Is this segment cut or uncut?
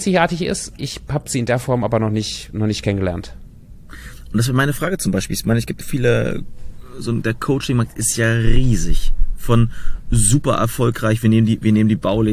cut